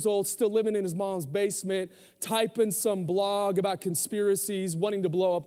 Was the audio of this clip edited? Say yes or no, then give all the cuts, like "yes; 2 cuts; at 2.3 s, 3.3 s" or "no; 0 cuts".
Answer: no; 0 cuts